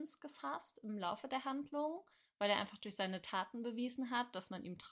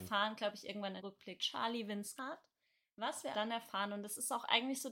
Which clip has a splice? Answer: second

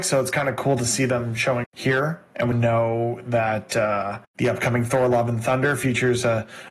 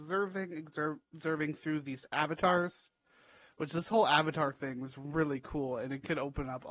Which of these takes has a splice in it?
first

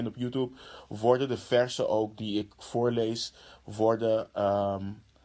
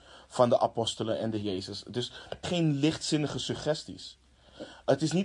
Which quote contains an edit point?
second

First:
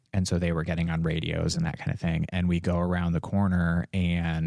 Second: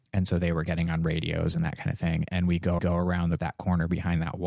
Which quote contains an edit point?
second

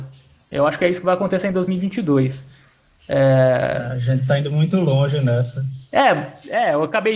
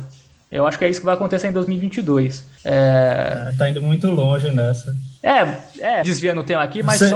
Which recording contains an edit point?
second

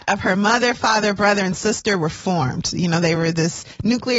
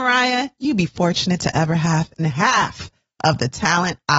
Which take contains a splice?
second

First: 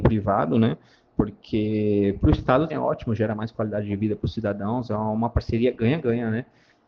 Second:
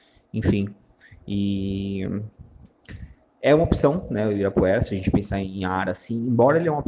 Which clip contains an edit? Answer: first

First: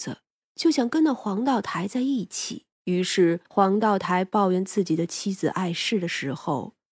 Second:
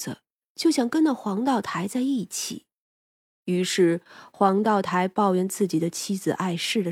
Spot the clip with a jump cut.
first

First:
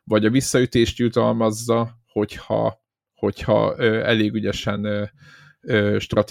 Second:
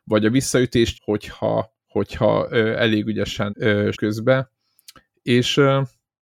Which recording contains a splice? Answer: second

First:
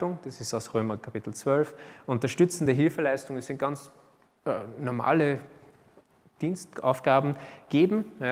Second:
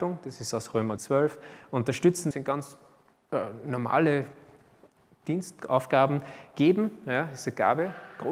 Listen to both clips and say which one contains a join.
second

